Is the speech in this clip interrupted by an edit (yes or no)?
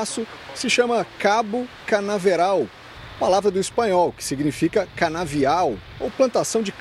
no